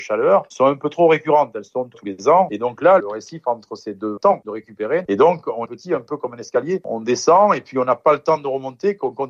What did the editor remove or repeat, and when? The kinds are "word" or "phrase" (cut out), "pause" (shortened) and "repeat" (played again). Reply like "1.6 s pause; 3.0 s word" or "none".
1.9 s phrase; 3.0 s phrase; 4.2 s phrase; 5.7 s phrase